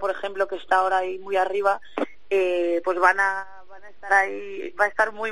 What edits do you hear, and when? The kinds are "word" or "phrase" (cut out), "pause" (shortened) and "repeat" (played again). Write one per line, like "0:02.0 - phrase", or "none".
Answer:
none